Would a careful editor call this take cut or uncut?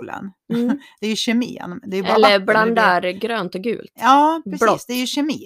uncut